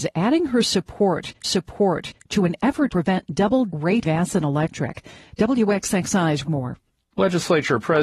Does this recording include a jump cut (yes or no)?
yes